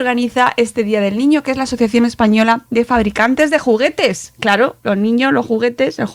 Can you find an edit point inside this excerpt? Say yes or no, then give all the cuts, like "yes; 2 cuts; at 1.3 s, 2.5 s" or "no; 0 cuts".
no; 0 cuts